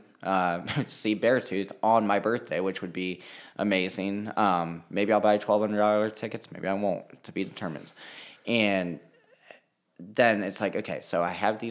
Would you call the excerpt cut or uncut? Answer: uncut